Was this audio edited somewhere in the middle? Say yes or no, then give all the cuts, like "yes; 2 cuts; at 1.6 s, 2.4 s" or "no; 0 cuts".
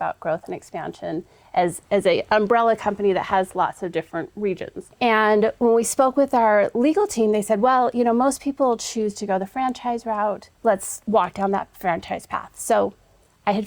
yes; 2 cuts; at 4.9 s, 10.5 s